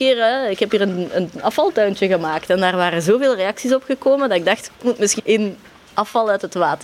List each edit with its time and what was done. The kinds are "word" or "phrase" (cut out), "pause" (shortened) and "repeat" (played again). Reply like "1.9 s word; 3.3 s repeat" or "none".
5.2 s phrase